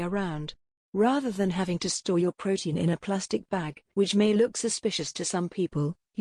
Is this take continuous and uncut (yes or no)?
no